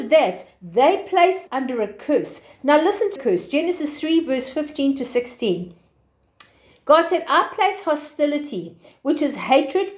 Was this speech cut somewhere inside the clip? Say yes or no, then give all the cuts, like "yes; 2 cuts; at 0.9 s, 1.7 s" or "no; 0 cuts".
yes; 2 cuts; at 1.5 s, 3.2 s